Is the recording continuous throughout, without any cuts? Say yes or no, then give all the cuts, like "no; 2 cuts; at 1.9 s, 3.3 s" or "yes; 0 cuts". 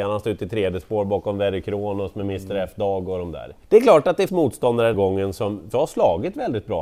no; 4 cuts; at 3.6 s, 4.3 s, 4.9 s, 5.7 s